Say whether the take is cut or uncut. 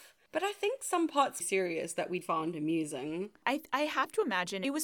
cut